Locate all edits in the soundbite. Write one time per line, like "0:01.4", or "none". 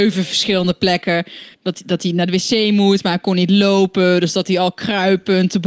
0:01.5